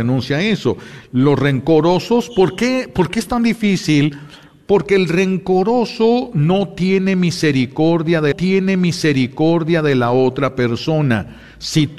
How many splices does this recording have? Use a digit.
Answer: 1